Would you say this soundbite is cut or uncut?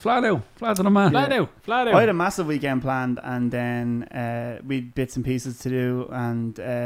uncut